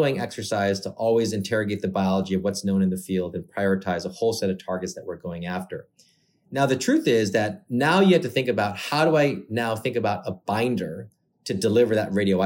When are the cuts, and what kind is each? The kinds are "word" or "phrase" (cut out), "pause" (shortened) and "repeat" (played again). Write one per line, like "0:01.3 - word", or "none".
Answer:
none